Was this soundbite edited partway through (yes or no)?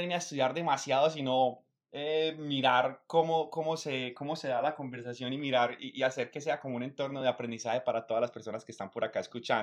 no